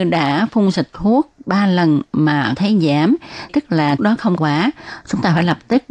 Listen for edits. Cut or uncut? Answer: cut